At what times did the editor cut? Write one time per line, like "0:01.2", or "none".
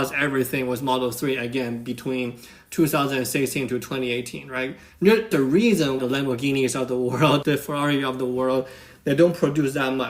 0:05.3
0:06.0
0:07.4